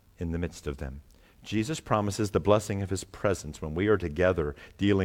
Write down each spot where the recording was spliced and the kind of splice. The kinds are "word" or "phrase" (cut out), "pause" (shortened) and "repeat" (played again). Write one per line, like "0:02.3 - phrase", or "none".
none